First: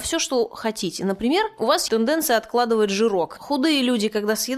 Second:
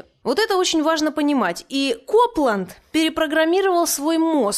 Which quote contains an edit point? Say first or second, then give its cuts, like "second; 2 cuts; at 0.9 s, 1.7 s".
first; 1 cut; at 1.9 s